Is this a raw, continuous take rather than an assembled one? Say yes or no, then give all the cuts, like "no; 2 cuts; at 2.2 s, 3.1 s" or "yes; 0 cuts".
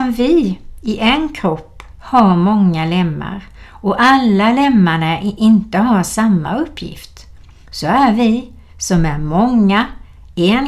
yes; 0 cuts